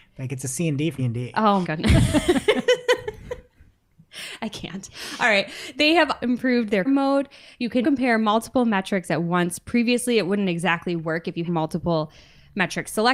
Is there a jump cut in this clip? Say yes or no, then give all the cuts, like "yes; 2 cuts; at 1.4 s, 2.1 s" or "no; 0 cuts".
yes; 6 cuts; at 1.0 s, 1.6 s, 6.2 s, 6.8 s, 7.8 s, 11.4 s